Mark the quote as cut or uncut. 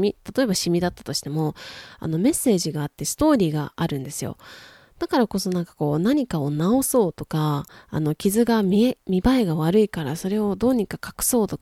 uncut